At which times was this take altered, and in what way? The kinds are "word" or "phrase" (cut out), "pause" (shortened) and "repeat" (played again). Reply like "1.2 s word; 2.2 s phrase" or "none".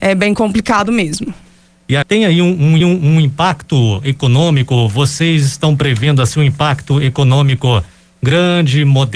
2.0 s word; 2.8 s repeat